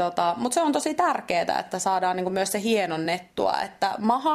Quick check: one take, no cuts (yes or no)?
yes